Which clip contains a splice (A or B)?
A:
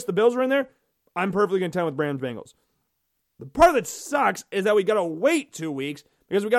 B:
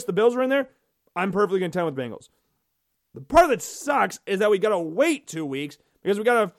B